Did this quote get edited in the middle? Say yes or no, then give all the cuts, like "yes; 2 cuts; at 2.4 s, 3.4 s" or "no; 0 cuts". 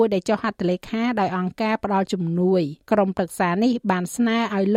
yes; 1 cut; at 2.8 s